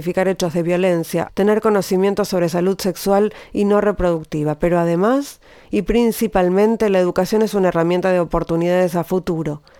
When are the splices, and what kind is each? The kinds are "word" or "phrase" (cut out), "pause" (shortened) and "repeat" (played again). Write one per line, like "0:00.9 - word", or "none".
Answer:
0:01.3 - word